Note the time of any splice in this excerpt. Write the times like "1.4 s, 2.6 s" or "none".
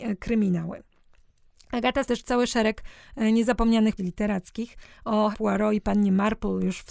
2.1 s, 4.0 s, 5.3 s